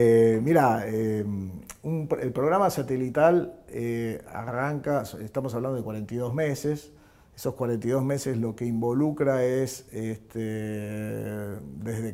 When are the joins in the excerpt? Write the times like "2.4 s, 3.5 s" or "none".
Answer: none